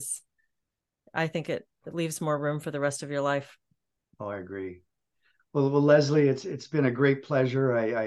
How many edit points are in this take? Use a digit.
0